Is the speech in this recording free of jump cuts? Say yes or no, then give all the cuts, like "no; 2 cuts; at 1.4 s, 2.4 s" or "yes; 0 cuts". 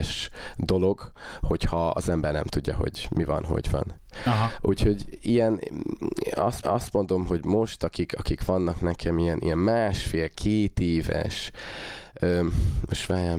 no; 1 cut; at 6.6 s